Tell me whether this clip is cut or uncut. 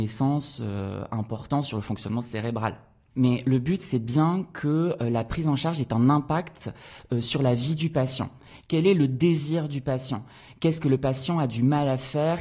uncut